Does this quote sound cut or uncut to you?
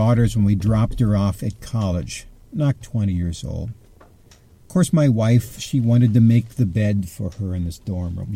cut